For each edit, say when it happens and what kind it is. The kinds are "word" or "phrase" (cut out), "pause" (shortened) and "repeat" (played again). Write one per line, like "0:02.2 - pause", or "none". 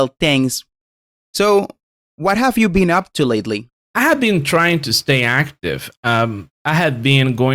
none